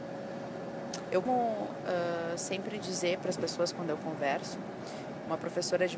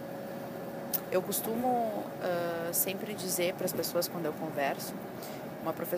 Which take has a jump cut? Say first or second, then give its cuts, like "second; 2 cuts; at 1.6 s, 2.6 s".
first; 1 cut; at 1.3 s